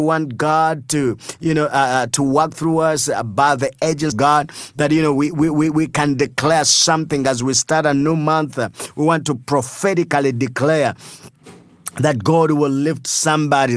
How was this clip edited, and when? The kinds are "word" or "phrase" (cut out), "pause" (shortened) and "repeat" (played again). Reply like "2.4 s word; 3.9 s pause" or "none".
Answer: 4.1 s phrase